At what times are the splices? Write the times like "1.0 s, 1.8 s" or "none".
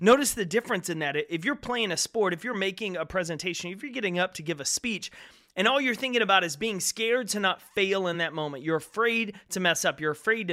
none